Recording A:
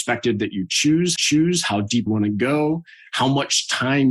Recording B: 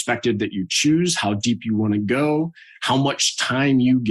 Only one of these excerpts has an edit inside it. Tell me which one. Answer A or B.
A